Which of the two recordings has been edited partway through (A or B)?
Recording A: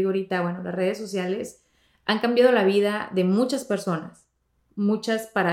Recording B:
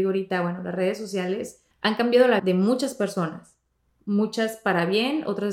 B